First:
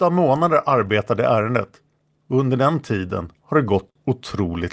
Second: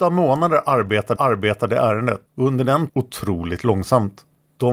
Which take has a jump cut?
second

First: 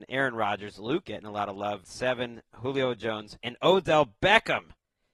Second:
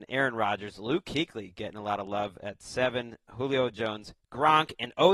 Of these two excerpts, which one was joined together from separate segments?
first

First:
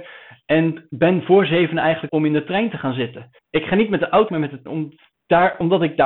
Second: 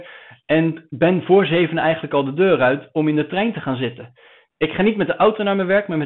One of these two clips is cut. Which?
first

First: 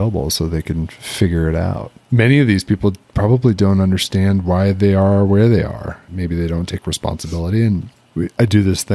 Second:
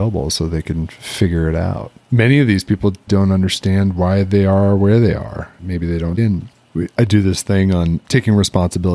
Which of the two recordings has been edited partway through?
second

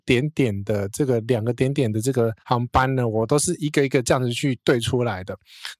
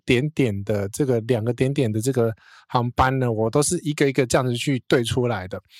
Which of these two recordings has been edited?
first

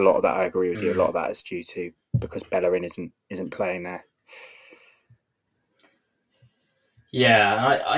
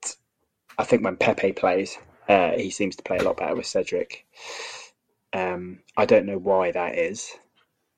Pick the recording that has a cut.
second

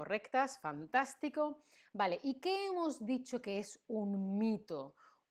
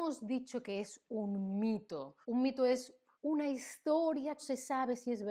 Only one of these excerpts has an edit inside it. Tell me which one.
second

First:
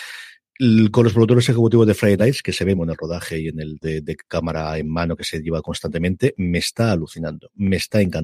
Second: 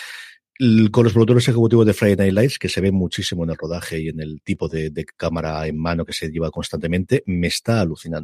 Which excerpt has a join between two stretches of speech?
first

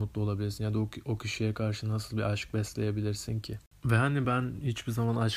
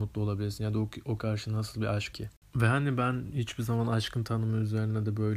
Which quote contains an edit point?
second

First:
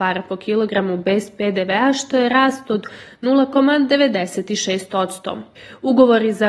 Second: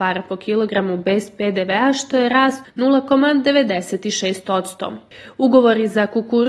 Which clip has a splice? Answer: second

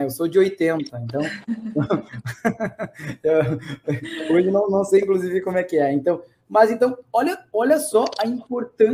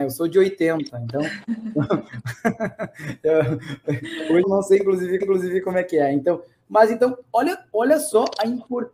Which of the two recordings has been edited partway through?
second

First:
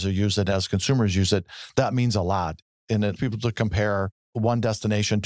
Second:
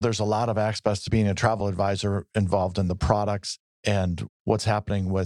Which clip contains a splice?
first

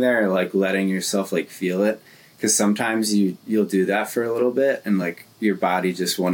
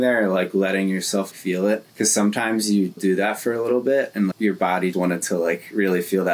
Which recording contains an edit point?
second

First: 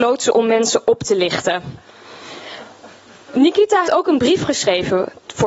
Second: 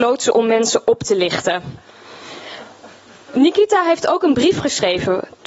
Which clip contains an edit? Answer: first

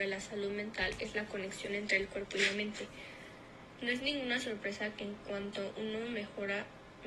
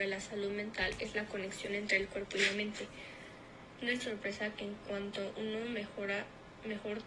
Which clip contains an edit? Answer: second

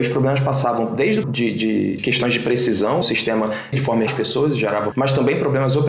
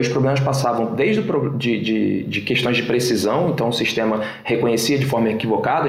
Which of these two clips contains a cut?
first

